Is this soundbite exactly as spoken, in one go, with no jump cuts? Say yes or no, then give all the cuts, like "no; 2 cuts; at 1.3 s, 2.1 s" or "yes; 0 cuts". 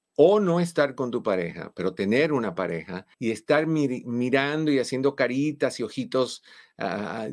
no; 1 cut; at 3.1 s